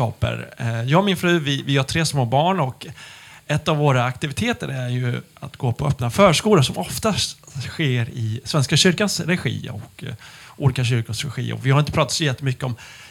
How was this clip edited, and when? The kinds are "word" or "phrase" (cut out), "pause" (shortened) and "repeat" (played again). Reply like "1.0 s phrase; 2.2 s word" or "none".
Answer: none